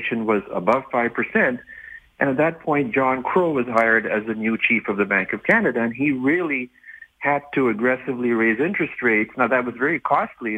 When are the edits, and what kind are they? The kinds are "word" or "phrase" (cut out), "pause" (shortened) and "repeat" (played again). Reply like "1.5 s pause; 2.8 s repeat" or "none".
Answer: none

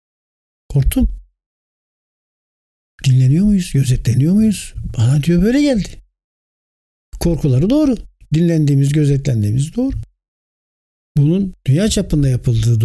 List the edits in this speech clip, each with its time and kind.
none

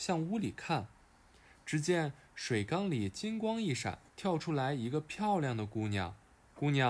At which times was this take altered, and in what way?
4.1 s pause

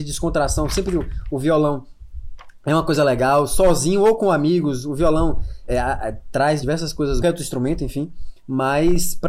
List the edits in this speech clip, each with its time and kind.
5.7 s word; 6.6 s word; 7.2 s phrase

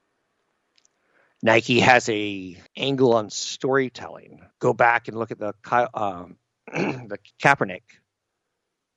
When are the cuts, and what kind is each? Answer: 2.7 s pause; 4.5 s pause; 7.3 s word

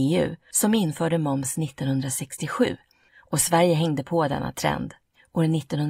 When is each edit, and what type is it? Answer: none

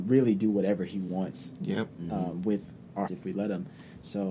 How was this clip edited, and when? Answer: 3.1 s word

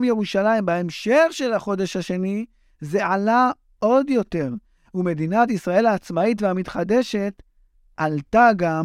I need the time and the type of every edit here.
none

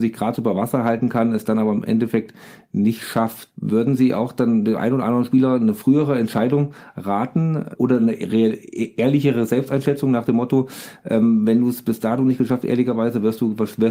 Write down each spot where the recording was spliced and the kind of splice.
none

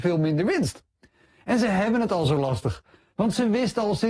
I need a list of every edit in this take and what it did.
none

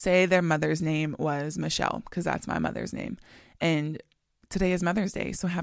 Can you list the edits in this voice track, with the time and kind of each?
none

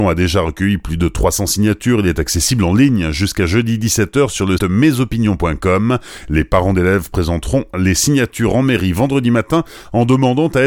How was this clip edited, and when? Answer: 4.6 s word

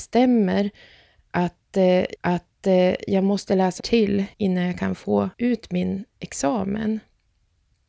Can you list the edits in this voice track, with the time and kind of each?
2.2 s repeat; 3.8 s phrase; 4.3 s pause; 5.3 s pause

